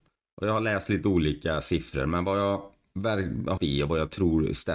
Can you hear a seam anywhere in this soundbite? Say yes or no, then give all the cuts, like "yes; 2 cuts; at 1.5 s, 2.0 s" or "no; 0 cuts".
yes; 1 cut; at 3.6 s